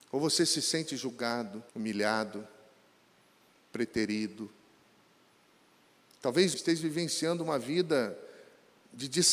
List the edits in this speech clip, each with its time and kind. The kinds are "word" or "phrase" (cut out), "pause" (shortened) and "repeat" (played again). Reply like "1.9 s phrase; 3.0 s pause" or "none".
1.7 s pause; 6.5 s word

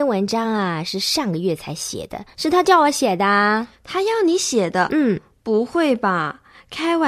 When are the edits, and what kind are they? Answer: 2.3 s pause; 3.8 s pause

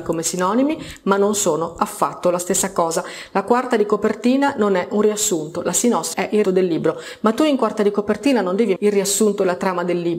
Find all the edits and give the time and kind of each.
6.1 s word; 6.4 s word; 8.8 s word

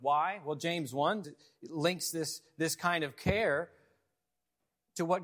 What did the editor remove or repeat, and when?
1.2 s word

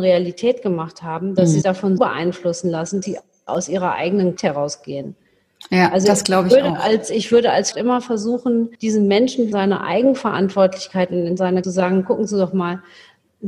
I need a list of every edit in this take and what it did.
1.6 s word; 2.0 s word; 3.0 s word; 4.4 s word; 7.7 s word; 8.7 s pause; 9.5 s phrase; 11.6 s phrase

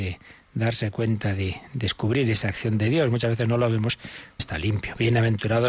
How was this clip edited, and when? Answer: 4.4 s phrase

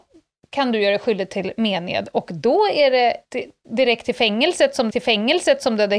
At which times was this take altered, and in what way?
3.2 s pause; 4.9 s repeat

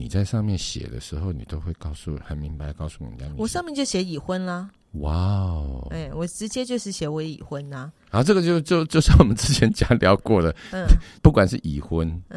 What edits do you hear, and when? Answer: 11.2 s pause

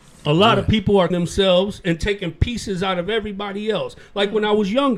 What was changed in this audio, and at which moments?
1.1 s word

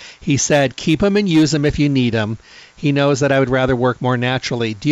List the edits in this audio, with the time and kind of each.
none

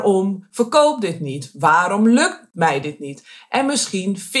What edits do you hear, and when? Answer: none

